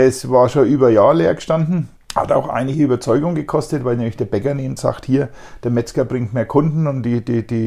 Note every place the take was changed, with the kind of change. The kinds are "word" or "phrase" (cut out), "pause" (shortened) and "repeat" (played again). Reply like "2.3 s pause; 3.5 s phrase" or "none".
2.0 s pause; 4.8 s word